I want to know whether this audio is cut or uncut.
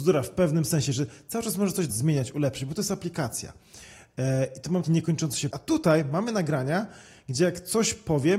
cut